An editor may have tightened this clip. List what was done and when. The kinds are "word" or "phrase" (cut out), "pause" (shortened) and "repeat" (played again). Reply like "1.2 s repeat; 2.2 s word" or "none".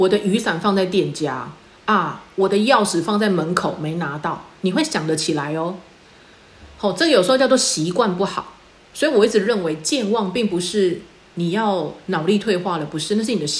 none